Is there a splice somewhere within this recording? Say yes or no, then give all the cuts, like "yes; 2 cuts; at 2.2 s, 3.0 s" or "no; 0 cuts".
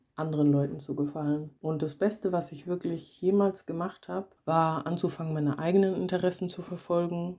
yes; 1 cut; at 1.6 s